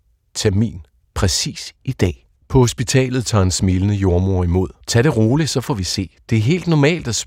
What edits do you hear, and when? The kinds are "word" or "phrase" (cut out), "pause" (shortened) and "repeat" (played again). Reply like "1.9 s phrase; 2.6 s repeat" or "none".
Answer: 1.0 s pause; 2.4 s pause; 4.8 s pause